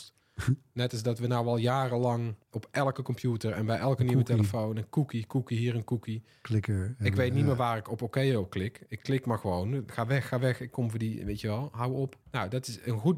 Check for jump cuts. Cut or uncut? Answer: cut